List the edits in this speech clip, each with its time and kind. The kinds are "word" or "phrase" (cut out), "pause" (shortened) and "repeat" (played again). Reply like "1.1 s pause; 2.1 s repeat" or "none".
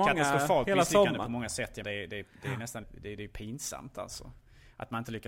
1.8 s word; 2.8 s word

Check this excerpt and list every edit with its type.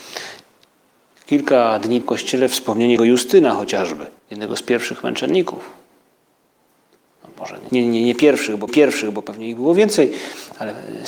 2.0 s phrase; 3.0 s word; 4.2 s pause; 7.7 s word; 8.7 s repeat

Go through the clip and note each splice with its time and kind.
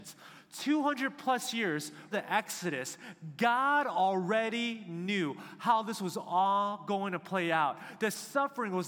2.1 s word

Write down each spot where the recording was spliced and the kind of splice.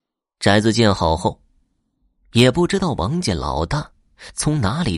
none

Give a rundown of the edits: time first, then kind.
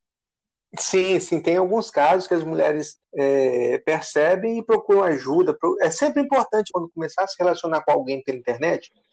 3.0 s pause; 6.7 s word

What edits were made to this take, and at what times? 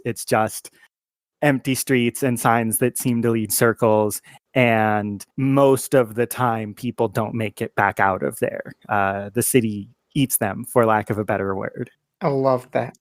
3.5 s phrase; 5.3 s pause

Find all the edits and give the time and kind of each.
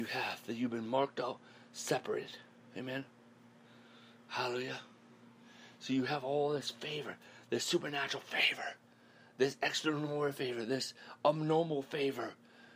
none

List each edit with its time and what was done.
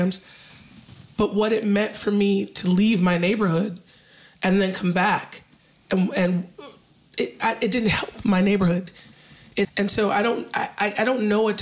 9.6 s phrase

